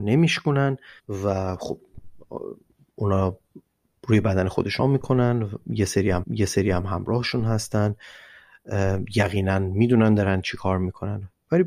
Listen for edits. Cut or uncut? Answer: cut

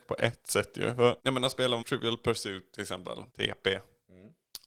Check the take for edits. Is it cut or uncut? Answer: cut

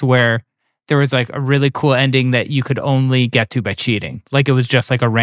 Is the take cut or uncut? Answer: uncut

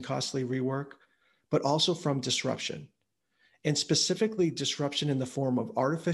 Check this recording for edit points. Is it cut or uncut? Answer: uncut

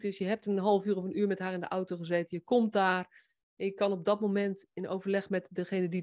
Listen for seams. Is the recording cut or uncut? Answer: uncut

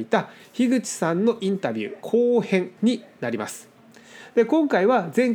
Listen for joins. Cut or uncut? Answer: cut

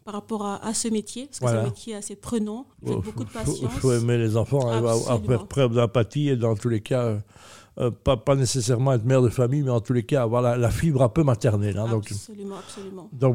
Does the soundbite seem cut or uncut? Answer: cut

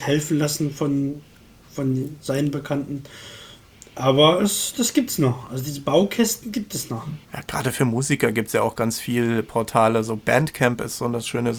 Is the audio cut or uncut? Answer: cut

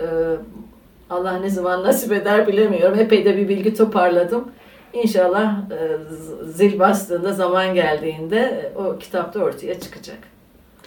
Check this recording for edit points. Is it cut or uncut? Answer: uncut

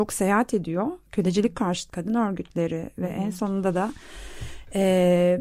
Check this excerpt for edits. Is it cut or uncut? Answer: cut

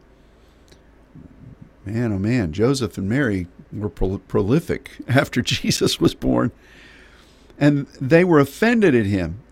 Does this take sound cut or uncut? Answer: cut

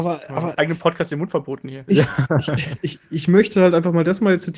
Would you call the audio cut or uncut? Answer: uncut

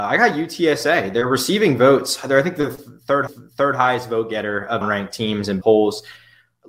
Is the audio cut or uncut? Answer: cut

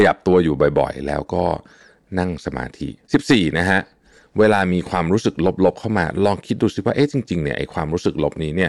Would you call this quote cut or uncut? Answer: uncut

